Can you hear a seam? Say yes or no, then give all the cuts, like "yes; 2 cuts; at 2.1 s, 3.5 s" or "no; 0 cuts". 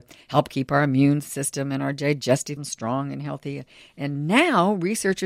yes; 1 cut; at 2.6 s